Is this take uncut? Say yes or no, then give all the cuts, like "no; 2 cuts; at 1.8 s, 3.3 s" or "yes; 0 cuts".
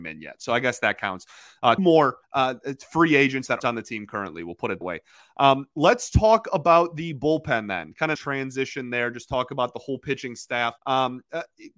no; 6 cuts; at 1.8 s, 2.2 s, 3.6 s, 4.8 s, 8.1 s, 10.8 s